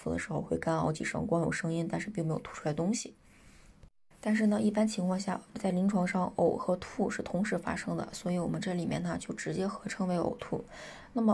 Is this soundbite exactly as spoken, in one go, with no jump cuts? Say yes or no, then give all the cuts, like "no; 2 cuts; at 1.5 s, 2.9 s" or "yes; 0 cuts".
yes; 0 cuts